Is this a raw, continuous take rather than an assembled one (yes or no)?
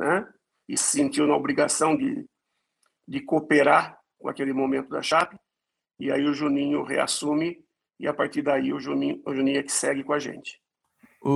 yes